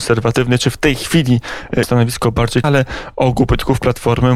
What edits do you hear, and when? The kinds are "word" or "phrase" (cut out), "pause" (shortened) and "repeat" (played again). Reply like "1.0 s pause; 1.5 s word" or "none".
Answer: 1.8 s word; 2.6 s word